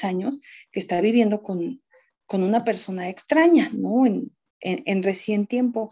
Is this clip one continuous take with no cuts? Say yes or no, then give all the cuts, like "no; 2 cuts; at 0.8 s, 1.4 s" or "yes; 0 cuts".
yes; 0 cuts